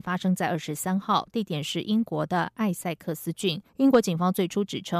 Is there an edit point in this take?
yes; 1 cut; at 3.7 s

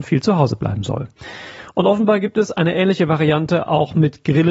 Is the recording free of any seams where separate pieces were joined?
yes; 0 cuts

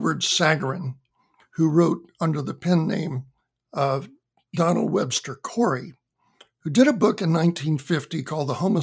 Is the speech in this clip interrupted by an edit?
yes; 1 cut; at 3.4 s

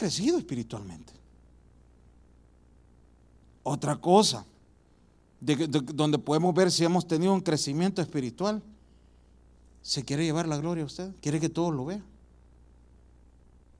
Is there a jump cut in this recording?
no; 0 cuts

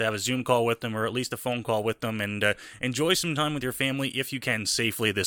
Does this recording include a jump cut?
no; 0 cuts

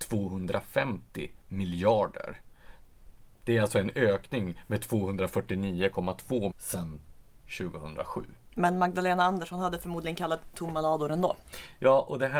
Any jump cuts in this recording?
yes; 1 cut; at 6.5 s

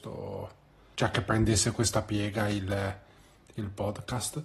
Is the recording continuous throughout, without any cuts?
no; 1 cut; at 0.9 s

